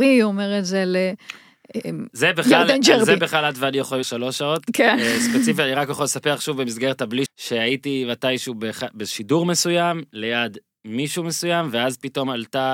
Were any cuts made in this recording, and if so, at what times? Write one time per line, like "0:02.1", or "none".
0:04.0
0:07.3